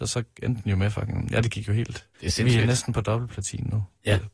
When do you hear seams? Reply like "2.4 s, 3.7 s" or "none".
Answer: 2.1 s